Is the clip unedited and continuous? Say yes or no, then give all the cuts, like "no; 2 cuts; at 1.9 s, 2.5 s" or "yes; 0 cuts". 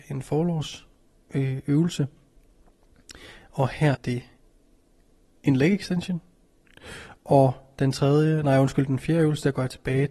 no; 1 cut; at 3.9 s